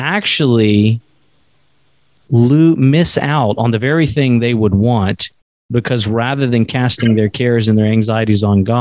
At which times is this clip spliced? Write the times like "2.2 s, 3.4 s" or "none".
none